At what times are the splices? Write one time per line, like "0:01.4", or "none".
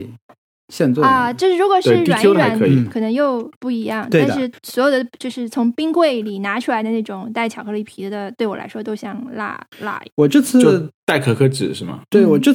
0:03.6
0:04.6
0:10.1

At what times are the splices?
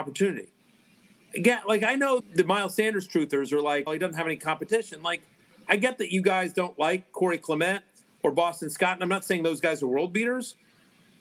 0:02.2
0:03.9

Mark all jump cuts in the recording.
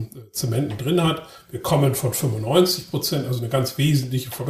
none

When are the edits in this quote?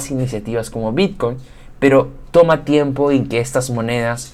none

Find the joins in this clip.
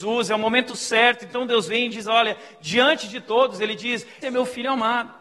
0:04.2

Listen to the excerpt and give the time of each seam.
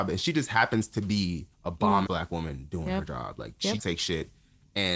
0:01.5
0:02.1
0:03.8

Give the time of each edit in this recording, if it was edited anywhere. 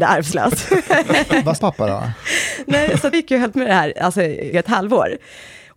0:01.6
0:03.1
0:03.5
0:04.5

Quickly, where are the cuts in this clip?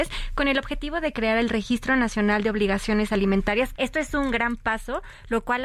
0:03.8

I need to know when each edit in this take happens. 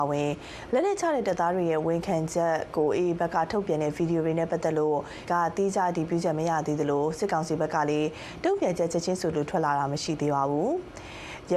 0:05.3

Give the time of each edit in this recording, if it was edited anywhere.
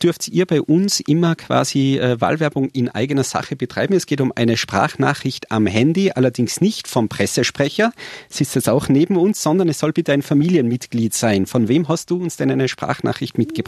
none

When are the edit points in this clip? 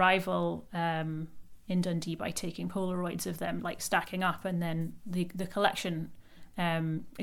none

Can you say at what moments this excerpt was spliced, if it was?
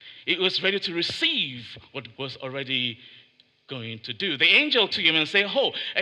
0:02.1
0:04.9

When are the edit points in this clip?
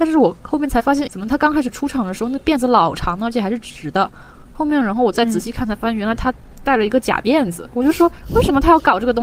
0:01.1

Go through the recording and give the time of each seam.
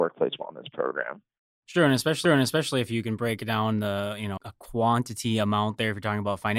0:02.3
0:04.4

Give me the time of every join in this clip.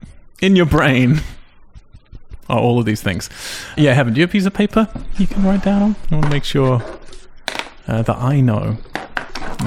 none

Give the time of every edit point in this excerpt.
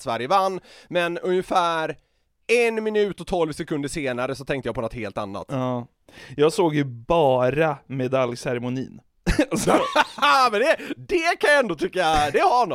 none

